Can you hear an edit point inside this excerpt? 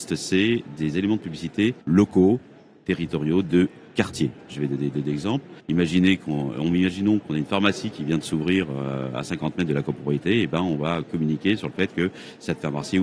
yes; 3 cuts; at 1.8 s, 3.4 s, 5.6 s

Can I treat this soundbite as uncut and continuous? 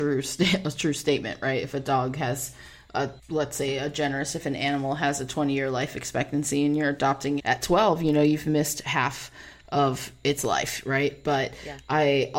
no; 2 cuts; at 3.2 s, 7.4 s

